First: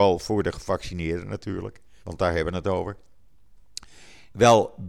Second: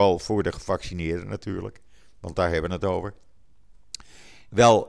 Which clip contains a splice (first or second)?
first